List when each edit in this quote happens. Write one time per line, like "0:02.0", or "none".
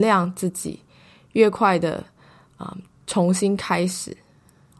none